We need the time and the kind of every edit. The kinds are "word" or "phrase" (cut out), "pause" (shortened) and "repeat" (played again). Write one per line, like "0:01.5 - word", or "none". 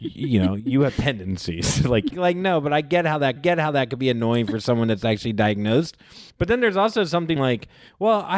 0:02.1 - phrase
0:03.4 - repeat
0:06.3 - pause
0:07.4 - phrase